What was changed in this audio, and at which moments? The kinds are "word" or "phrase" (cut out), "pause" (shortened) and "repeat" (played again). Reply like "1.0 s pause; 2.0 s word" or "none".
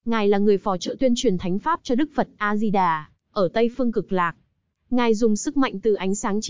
none

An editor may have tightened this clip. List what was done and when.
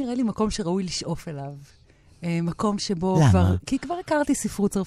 none

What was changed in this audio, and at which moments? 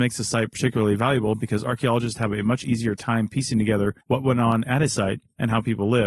4.0 s pause

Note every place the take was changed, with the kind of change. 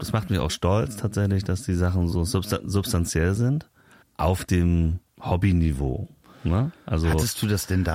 4.0 s pause; 5.1 s pause

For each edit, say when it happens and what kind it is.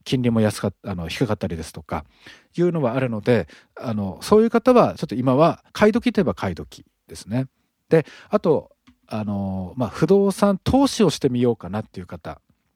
5.7 s pause; 7.7 s pause

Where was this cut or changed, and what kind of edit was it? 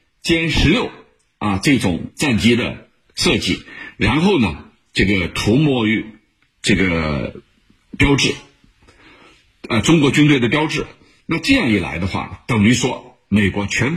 none

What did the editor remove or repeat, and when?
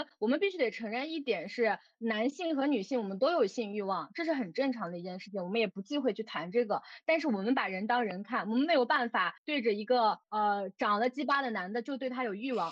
9.4 s pause; 10.2 s pause

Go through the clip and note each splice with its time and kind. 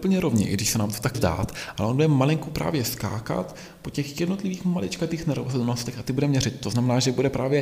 1.1 s word

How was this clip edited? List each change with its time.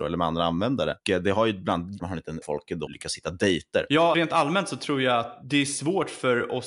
2.0 s phrase; 2.4 s phrase; 2.9 s word; 4.1 s word

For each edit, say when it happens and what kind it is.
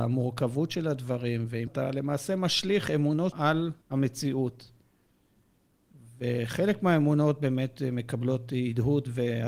1.7 s word; 3.3 s word; 3.8 s pause

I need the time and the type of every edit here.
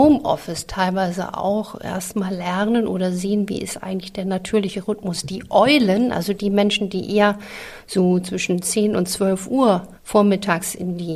10.0 s pause

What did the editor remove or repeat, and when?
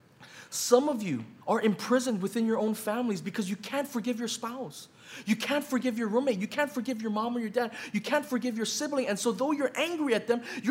1.4 s pause

